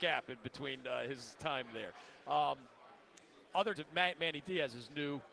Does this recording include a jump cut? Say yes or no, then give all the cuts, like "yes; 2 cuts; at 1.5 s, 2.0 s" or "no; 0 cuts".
yes; 1 cut; at 3.8 s